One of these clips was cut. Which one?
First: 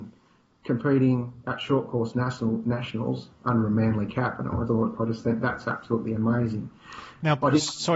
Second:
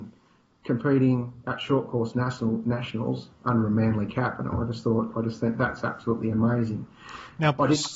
first; 1 cut; at 4.7 s

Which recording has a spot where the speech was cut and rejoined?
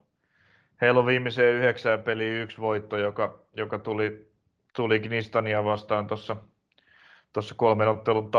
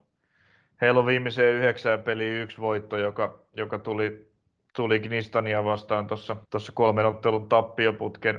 second; 1 cut; at 6.4 s

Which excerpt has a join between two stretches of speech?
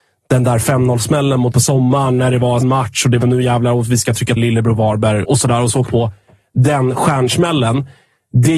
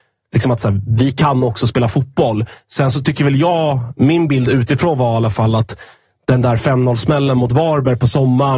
first; 6 cuts; at 1.5 s, 2.6 s, 3.2 s, 4.4 s, 5.2 s, 5.9 s

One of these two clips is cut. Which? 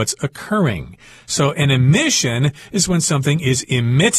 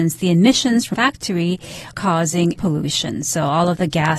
second; 3 cuts; at 0.9 s, 1.9 s, 2.5 s

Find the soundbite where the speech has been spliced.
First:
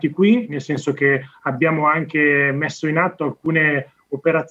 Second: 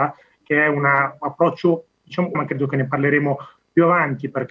second; 1 cut; at 2.3 s

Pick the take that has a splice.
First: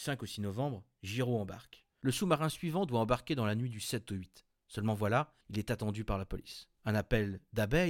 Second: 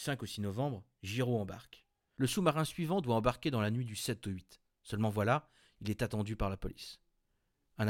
first; 3 cuts; at 1.9 s, 5.4 s, 6.7 s

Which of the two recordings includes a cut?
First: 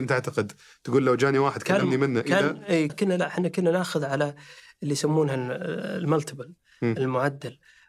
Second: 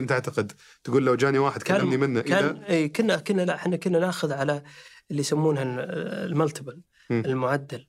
first; 1 cut; at 2.9 s

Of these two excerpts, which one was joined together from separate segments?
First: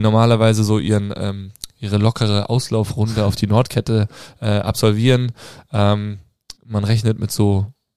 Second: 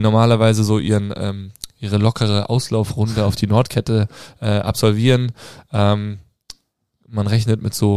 first; 1 cut; at 6.6 s

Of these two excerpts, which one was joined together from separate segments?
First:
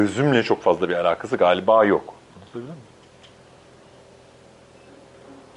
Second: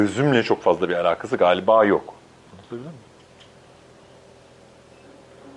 first; 1 cut; at 2.2 s

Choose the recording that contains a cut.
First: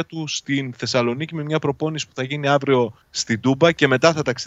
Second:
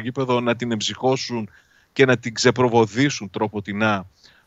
first; 1 cut; at 3.0 s

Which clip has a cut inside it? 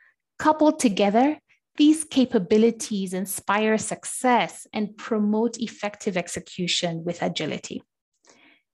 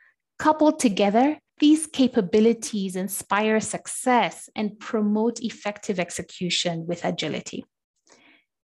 second; 1 cut; at 1.5 s

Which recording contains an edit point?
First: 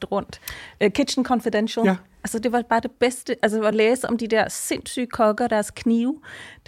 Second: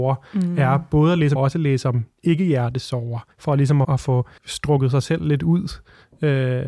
second; 4 cuts; at 1.4 s, 3.3 s, 3.8 s, 4.4 s

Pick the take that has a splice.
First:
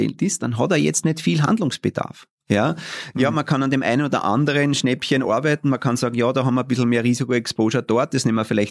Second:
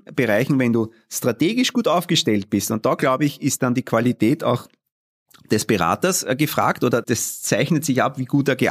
second; 1 cut; at 7.0 s

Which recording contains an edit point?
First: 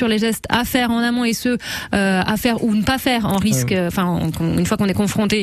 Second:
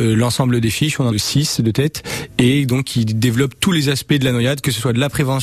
second; 1 cut; at 1.1 s

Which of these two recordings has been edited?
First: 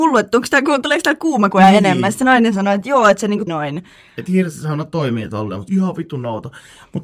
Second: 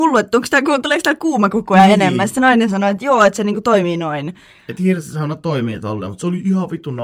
first; 3 cuts; at 1.5 s, 3.5 s, 5.7 s

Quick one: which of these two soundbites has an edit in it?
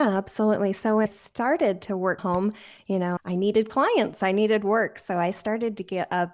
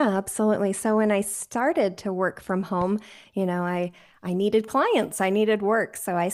first; 3 cuts; at 1.1 s, 2.2 s, 3.2 s

